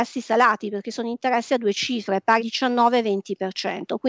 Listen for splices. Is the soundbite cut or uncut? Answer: cut